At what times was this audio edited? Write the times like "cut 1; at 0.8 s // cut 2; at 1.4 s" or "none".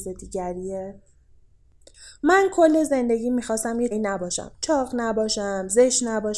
cut 1; at 3.9 s